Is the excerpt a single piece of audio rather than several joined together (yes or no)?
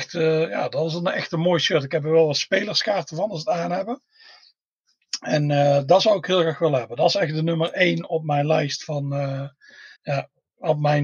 no